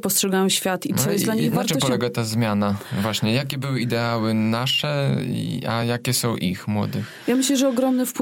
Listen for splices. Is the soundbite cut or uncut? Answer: uncut